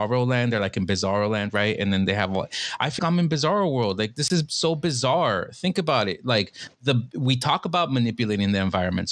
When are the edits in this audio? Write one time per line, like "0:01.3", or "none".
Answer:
0:03.0